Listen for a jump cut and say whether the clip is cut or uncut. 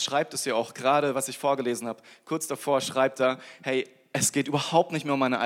uncut